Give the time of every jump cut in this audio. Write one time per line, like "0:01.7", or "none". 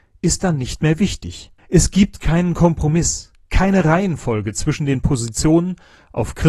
0:01.6